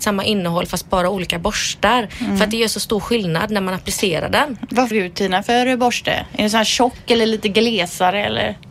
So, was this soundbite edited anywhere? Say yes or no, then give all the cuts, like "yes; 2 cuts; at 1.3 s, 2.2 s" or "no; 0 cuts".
yes; 1 cut; at 4.9 s